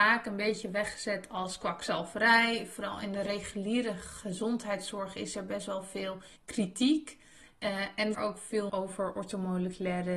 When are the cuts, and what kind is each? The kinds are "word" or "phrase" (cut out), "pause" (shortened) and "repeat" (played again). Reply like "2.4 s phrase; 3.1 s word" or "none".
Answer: 6.4 s pause; 8.1 s phrase; 8.7 s word